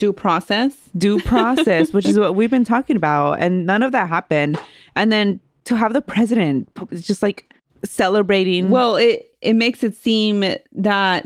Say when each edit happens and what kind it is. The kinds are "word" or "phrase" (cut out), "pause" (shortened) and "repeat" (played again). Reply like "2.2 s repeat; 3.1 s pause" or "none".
none